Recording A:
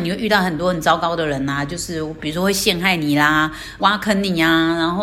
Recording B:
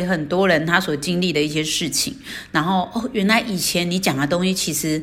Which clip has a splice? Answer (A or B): A